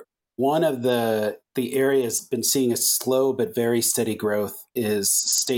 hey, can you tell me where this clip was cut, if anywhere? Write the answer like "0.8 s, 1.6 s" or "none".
2.2 s

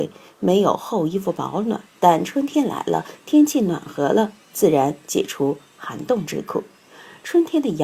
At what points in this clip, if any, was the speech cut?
1.9 s

